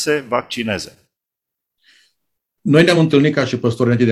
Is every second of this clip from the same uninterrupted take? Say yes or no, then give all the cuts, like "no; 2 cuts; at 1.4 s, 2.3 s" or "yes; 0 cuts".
yes; 0 cuts